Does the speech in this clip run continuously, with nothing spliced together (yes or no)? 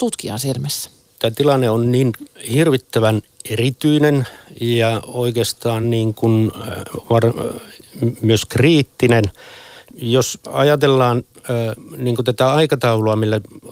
yes